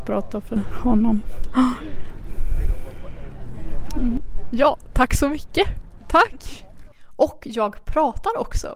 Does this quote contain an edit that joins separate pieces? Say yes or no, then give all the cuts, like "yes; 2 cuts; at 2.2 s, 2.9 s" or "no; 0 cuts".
no; 0 cuts